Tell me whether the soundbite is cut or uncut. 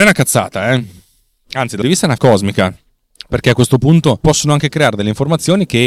cut